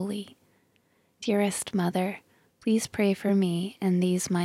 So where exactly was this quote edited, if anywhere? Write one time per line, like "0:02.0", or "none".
none